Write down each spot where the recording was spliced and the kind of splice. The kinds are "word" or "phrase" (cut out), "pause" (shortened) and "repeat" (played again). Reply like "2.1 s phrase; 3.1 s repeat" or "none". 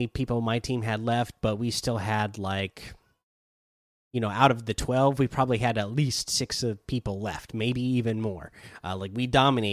none